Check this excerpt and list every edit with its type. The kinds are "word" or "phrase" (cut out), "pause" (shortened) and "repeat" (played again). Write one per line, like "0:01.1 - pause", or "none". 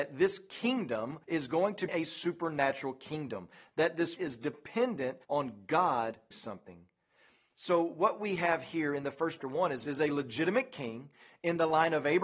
0:01.2 - pause
0:01.9 - word
0:04.2 - word
0:05.2 - pause
0:06.3 - word
0:09.4 - phrase
0:09.8 - phrase